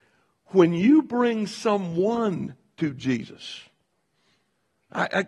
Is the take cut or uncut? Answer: uncut